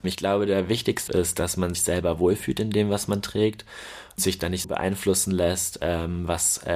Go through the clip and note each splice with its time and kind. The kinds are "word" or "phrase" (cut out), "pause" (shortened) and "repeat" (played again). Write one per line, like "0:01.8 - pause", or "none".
0:01.1 - word
0:01.7 - word
0:04.2 - word
0:04.6 - word

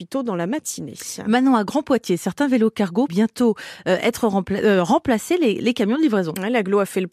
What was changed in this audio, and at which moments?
0:03.1 - word

